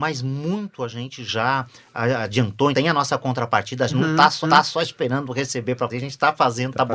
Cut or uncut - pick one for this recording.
cut